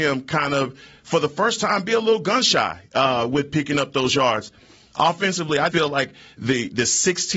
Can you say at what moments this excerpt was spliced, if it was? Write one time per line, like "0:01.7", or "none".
0:05.7